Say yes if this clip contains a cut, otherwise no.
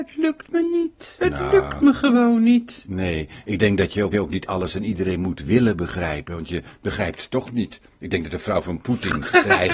yes